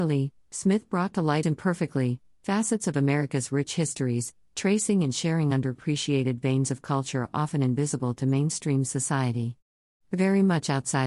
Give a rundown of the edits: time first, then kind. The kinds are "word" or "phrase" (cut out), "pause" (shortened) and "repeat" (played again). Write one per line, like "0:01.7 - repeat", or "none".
0:01.4 - phrase